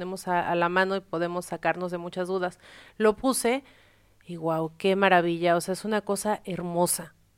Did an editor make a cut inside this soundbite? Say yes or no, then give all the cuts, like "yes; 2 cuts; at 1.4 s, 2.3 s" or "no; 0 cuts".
no; 0 cuts